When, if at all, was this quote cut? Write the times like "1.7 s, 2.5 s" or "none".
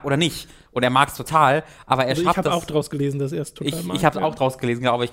none